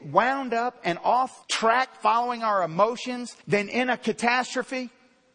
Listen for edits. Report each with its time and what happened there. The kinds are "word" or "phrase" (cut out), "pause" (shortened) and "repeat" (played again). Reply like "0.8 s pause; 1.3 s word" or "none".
1.4 s pause; 3.4 s pause